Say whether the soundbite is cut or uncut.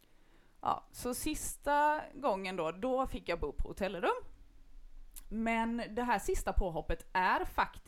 uncut